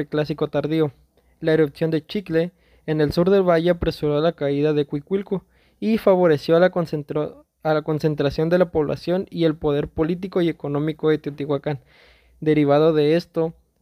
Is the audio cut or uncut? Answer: uncut